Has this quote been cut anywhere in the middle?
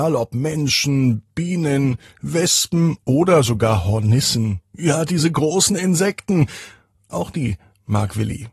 no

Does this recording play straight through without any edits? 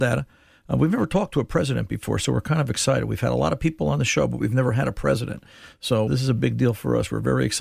no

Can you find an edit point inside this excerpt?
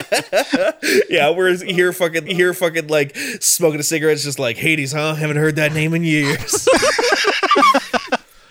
yes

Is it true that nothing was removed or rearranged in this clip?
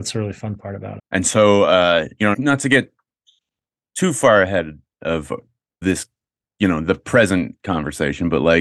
no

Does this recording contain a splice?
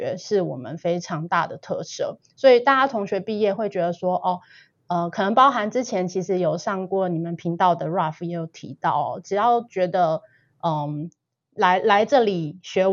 no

